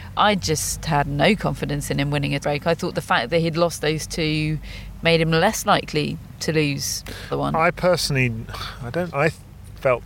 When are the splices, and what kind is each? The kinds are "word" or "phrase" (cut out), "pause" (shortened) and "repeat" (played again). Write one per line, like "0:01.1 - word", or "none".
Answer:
0:02.4 - word
0:07.3 - word
0:09.1 - word